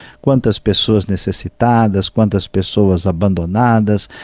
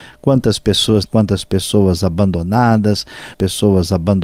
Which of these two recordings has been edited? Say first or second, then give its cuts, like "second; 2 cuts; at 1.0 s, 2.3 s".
second; 2 cuts; at 1.1 s, 3.3 s